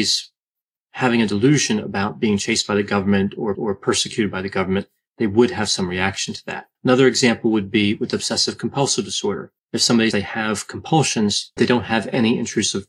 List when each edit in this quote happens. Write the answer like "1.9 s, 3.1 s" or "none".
3.5 s, 6.7 s, 9.6 s, 10.1 s, 11.6 s